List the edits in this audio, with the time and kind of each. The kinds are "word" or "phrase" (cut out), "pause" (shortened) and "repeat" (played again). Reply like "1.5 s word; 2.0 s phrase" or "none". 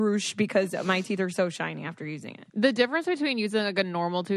2.5 s pause